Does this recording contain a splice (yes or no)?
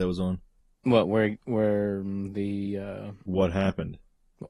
yes